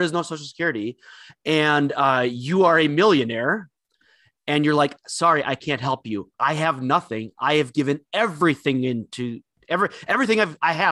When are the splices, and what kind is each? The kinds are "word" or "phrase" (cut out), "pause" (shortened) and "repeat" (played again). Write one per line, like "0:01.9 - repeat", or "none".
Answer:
0:06.3 - pause